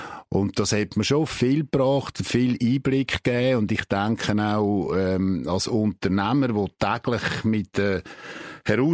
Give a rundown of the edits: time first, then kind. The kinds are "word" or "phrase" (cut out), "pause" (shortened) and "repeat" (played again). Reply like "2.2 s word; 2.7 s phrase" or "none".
none